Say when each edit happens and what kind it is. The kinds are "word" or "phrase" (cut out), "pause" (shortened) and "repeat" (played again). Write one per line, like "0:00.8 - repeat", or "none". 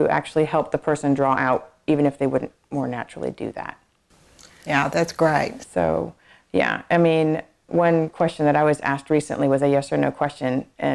0:07.7 - word